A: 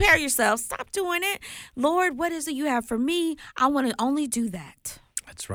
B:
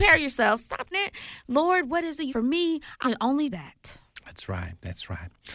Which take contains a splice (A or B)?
B